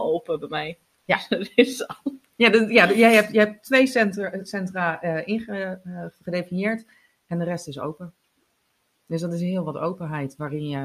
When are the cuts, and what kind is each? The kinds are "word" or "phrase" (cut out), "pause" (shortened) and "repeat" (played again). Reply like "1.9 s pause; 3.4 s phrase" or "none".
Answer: none